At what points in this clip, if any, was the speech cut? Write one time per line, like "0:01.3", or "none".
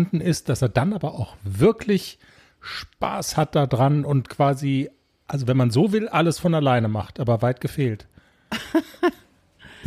none